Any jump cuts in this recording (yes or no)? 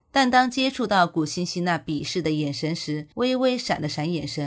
yes